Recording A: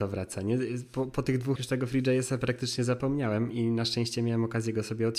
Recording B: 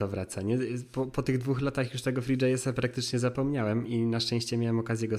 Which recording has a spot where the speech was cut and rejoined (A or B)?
A